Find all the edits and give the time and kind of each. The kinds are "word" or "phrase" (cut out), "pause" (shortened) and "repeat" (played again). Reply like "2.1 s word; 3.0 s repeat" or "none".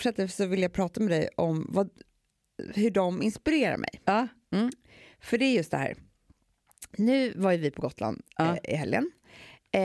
none